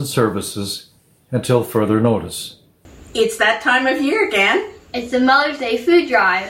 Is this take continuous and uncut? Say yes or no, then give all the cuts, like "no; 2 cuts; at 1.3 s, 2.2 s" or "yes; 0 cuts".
yes; 0 cuts